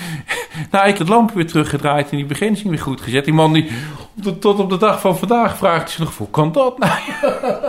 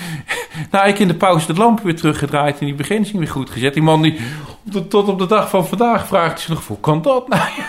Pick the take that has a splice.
first; 1 cut; at 1.0 s

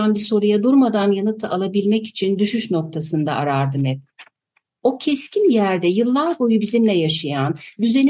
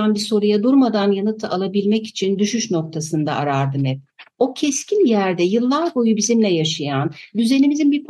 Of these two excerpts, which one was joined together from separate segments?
second; 1 cut; at 4.3 s

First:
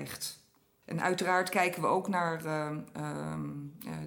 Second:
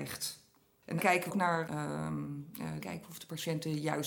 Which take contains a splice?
second; 4 cuts; at 1.0 s, 1.3 s, 1.7 s, 2.8 s

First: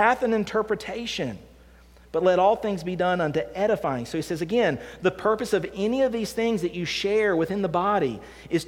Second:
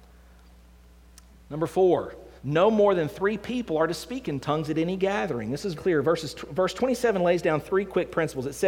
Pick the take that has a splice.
second; 2 cuts; at 2.4 s, 5.7 s

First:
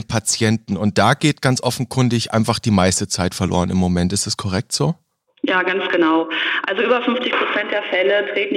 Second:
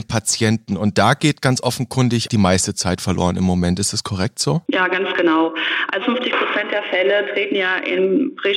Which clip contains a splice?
second; 3 cuts; at 2.3 s, 4.7 s, 6.0 s

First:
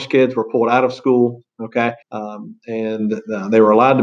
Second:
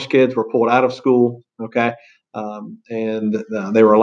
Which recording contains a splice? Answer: first; 1 cut; at 2.0 s

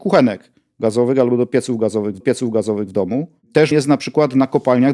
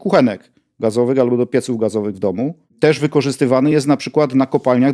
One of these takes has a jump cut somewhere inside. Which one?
first; 2 cuts; at 2.2 s, 3.7 s

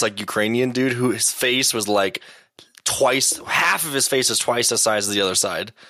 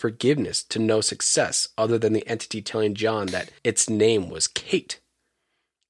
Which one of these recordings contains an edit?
second; 1 cut; at 3.6 s

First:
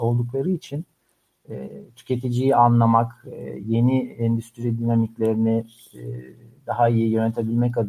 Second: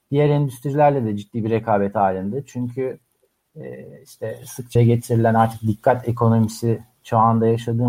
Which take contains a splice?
second; 1 cut; at 4.8 s

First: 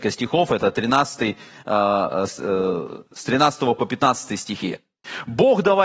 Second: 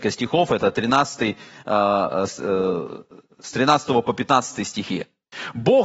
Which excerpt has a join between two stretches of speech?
first; 1 cut; at 3.1 s

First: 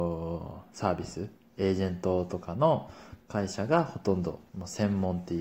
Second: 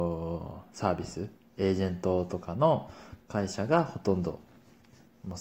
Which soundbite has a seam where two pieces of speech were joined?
first; 1 cut; at 4.5 s

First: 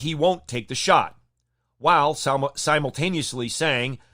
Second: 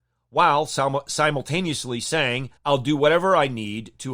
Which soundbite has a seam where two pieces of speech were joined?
second; 1 cut; at 2.6 s

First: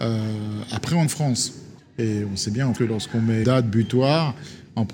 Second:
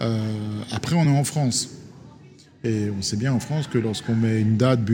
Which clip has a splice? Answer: first; 4 cuts; at 1.0 s, 1.8 s, 2.7 s, 3.4 s

